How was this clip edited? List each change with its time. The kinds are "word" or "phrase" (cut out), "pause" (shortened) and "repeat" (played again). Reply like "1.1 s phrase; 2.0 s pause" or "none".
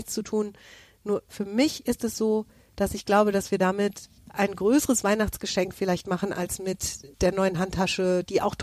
4.2 s pause; 7.1 s pause